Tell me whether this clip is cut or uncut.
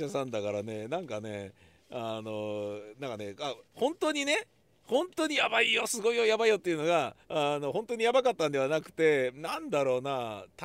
cut